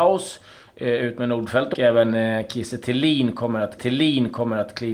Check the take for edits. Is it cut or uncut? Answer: cut